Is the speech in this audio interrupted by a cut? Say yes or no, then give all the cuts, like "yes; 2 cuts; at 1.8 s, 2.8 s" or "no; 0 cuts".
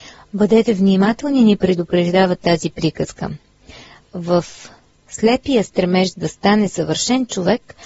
no; 0 cuts